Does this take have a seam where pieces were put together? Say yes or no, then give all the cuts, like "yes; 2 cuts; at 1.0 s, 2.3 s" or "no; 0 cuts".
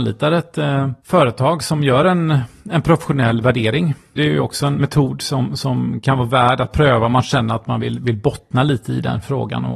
no; 0 cuts